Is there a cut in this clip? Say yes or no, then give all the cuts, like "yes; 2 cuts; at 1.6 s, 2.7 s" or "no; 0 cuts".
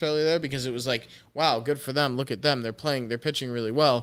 no; 0 cuts